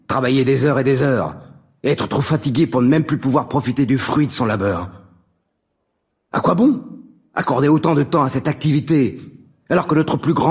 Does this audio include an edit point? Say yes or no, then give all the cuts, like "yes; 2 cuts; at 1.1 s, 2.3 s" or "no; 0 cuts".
no; 0 cuts